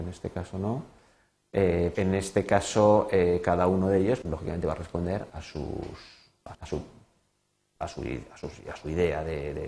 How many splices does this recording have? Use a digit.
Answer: 4